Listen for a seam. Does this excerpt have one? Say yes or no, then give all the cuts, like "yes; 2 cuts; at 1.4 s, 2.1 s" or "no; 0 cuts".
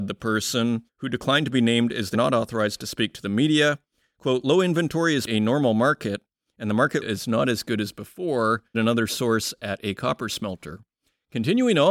yes; 4 cuts; at 2.1 s, 5.3 s, 7.0 s, 8.7 s